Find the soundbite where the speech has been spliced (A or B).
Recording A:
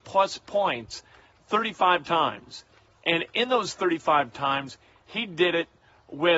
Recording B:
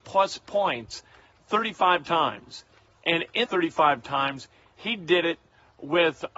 B